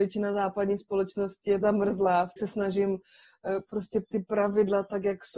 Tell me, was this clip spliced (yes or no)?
yes